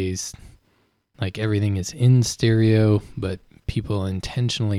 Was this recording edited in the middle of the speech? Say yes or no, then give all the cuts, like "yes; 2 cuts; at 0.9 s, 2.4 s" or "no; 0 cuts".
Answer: no; 0 cuts